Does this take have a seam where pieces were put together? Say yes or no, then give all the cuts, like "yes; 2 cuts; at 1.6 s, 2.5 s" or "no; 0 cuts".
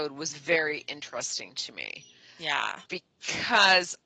yes; 1 cut; at 2.9 s